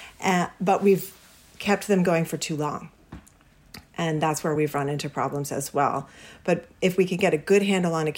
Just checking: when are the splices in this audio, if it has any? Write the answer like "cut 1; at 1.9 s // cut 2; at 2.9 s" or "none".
none